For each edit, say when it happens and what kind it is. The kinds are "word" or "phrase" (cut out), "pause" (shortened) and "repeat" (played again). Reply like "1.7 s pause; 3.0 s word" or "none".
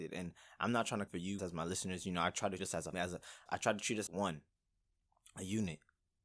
1.1 s word; 1.4 s word; 2.6 s word; 2.9 s word; 3.5 s word; 4.1 s word